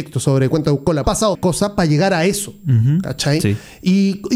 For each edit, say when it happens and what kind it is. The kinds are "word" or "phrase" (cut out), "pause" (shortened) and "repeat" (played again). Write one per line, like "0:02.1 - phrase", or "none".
0:01.0 - phrase
0:01.3 - word